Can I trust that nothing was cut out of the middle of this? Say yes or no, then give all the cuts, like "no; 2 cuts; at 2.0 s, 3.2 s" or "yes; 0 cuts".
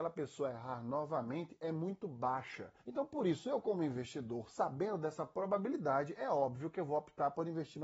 no; 1 cut; at 2.8 s